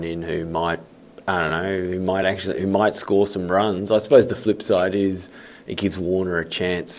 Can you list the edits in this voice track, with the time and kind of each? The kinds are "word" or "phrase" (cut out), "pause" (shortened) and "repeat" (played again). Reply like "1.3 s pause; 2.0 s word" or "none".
none